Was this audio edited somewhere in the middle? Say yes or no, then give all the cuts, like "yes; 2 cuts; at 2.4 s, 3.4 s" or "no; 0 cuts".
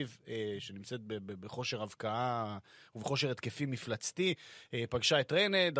no; 0 cuts